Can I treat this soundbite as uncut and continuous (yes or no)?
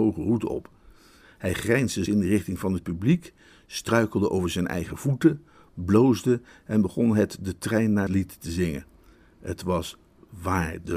no